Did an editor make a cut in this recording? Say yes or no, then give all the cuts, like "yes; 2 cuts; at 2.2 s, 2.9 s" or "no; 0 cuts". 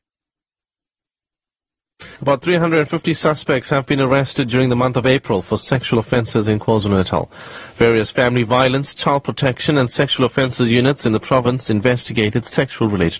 yes; 1 cut; at 2.2 s